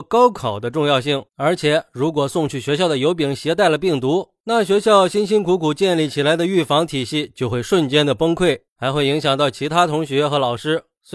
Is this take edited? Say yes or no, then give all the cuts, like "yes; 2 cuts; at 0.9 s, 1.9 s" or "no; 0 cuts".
yes; 1 cut; at 1.3 s